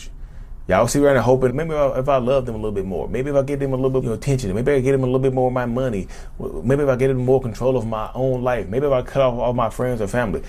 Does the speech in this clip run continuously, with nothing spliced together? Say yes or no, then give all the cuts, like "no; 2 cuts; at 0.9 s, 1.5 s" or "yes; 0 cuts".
no; 2 cuts; at 1.5 s, 4.0 s